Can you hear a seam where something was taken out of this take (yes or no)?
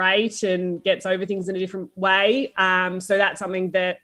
no